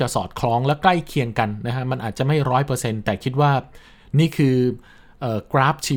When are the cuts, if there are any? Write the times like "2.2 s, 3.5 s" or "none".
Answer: none